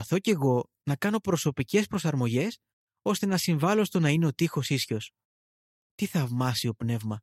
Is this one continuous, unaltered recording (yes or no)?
yes